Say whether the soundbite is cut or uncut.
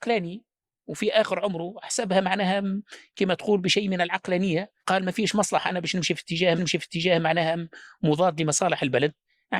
cut